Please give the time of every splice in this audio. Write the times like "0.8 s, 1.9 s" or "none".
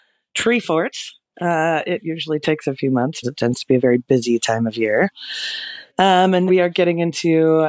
3.2 s, 5.9 s, 6.5 s